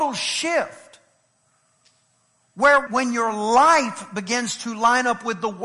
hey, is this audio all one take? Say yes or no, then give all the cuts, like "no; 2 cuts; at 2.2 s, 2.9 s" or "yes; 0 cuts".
no; 1 cut; at 2.9 s